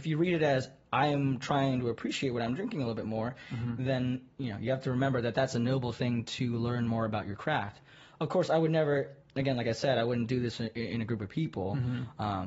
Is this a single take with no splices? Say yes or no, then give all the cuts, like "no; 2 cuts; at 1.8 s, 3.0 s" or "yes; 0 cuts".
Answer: yes; 0 cuts